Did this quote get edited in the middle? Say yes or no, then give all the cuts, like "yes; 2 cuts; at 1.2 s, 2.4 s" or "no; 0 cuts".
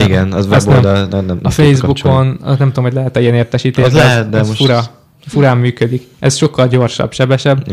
no; 0 cuts